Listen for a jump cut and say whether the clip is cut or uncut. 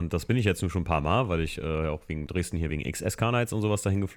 uncut